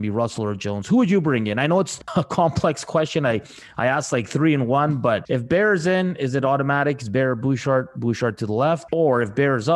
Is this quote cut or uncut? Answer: uncut